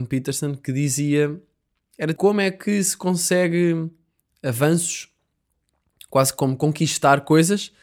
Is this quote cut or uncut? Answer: cut